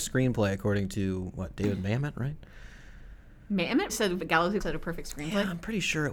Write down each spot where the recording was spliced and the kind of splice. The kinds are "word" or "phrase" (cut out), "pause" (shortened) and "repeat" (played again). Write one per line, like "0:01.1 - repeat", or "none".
0:03.9 - word
0:04.6 - word

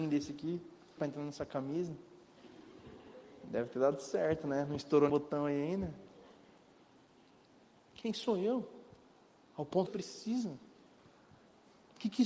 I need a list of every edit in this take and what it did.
0:01.0 - phrase
0:05.1 - word
0:09.9 - phrase

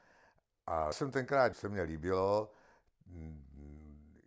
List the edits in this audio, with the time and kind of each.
0:00.9 - word
0:01.5 - word

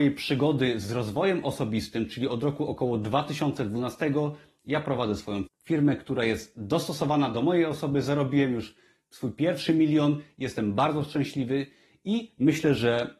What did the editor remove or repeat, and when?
0:05.5 - word

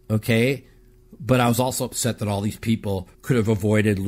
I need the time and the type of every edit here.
0:03.1 - pause

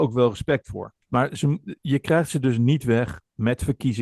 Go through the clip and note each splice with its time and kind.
0:01.0 - pause

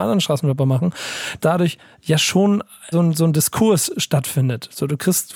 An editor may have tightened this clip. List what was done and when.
0:01.4 - word
0:02.9 - word

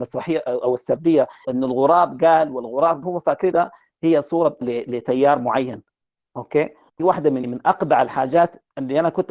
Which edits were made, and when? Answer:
0:01.4 - word
0:03.0 - word
0:03.5 - word
0:04.6 - word
0:07.0 - word
0:07.4 - word

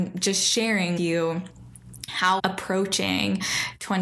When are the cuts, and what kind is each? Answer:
0:01.0 - word
0:02.4 - word

